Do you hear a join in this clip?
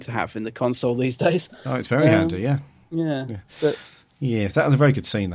no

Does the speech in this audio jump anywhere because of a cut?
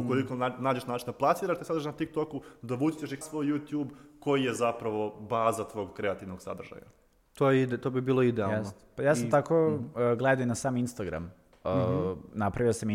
yes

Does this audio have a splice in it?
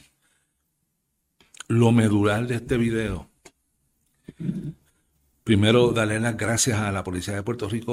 no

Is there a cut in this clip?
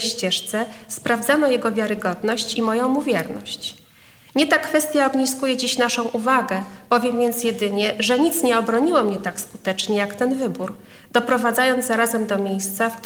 no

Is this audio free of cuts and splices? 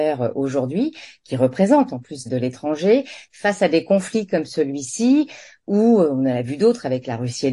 no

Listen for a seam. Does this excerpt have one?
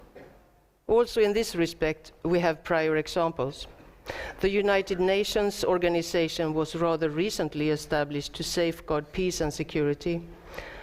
no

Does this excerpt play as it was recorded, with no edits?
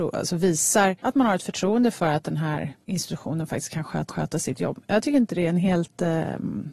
no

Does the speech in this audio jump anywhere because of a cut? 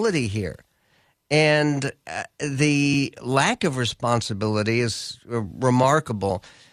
no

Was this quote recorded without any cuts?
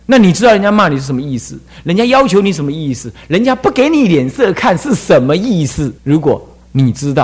no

